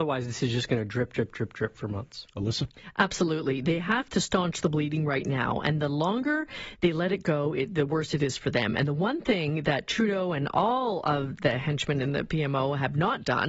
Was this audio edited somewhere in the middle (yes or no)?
yes